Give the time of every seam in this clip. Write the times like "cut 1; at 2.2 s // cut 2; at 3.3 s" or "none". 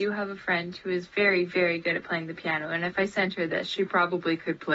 none